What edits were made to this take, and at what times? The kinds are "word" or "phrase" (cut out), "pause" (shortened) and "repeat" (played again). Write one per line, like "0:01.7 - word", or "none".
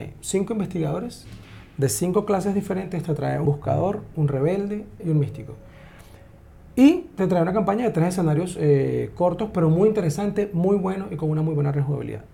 0:03.5 - phrase
0:05.0 - phrase